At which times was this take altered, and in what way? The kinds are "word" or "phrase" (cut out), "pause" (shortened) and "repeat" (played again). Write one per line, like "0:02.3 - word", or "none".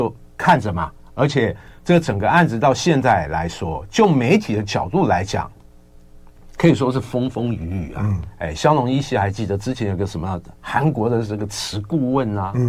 none